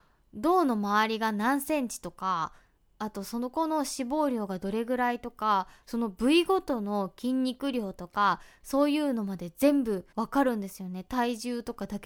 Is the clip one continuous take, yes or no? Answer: no